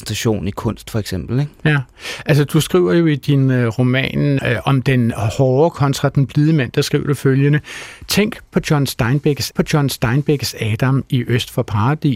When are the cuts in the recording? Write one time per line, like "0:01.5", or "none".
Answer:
0:04.4
0:09.5